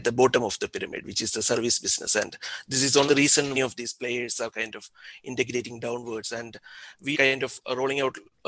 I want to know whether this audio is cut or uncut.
cut